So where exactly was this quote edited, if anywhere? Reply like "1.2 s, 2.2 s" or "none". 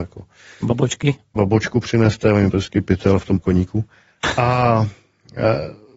1.4 s, 2.5 s, 3.4 s